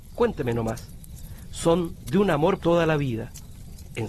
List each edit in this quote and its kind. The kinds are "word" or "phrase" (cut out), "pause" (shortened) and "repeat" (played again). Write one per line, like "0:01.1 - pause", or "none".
0:02.6 - word